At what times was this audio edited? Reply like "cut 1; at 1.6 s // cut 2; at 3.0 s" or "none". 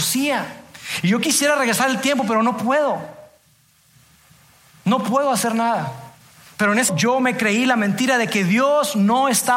cut 1; at 6.2 s // cut 2; at 6.9 s

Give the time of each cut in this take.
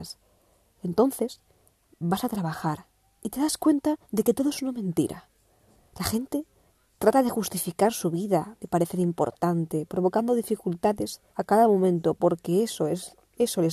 cut 1; at 4.0 s // cut 2; at 11.3 s

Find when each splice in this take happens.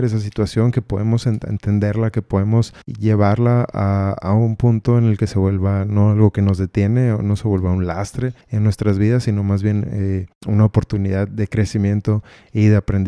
cut 1; at 2.8 s // cut 2; at 8.4 s // cut 3; at 10.3 s

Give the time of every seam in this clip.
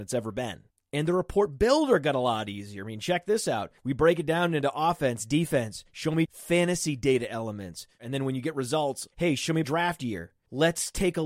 cut 1; at 3.8 s // cut 2; at 5.9 s // cut 3; at 6.3 s // cut 4; at 9.6 s

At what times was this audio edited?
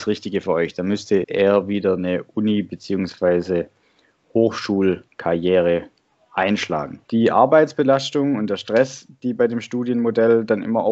cut 1; at 1.2 s // cut 2; at 5.1 s // cut 3; at 7.0 s

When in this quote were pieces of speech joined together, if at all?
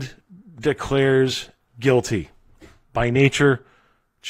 cut 1; at 1.6 s

